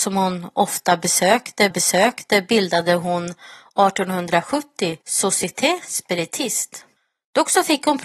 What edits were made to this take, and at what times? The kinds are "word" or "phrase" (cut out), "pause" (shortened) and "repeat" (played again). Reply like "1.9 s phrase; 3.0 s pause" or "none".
1.7 s repeat; 5.0 s pause; 7.0 s pause